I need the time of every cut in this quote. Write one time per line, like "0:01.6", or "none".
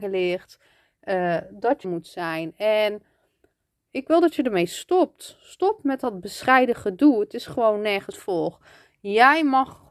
0:01.8
0:08.1